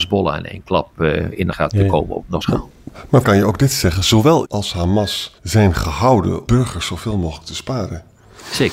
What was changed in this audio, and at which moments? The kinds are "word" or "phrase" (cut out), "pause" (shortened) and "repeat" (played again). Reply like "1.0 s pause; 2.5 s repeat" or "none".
1.5 s word; 2.4 s word; 3.2 s phrase; 4.4 s word; 5.4 s pause; 6.5 s word